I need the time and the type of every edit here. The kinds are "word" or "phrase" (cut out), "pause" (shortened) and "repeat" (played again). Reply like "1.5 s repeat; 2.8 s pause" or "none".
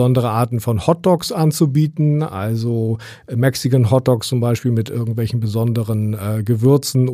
none